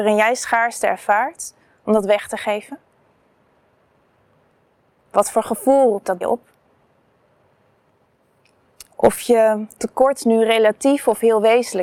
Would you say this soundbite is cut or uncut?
cut